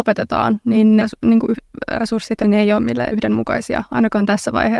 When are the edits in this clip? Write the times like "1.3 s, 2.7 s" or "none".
1.0 s, 2.4 s, 3.1 s